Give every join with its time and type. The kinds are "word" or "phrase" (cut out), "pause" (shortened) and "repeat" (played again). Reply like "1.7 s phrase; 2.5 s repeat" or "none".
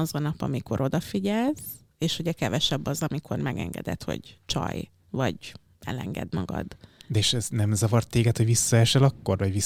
5.0 s pause; 6.8 s pause